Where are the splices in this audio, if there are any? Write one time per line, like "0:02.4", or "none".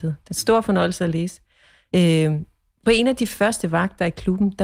none